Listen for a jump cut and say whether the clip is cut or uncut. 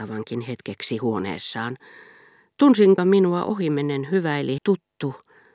cut